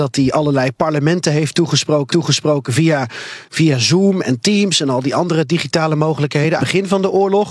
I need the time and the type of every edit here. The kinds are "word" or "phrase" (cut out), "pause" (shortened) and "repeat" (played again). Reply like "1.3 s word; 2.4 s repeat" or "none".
2.1 s repeat; 6.6 s phrase